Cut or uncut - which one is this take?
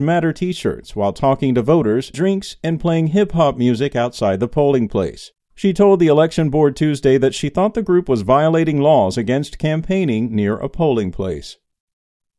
cut